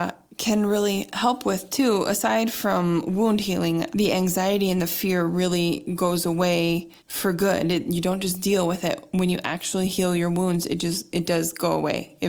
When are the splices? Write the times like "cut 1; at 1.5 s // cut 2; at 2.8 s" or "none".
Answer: cut 1; at 3.9 s // cut 2; at 7.0 s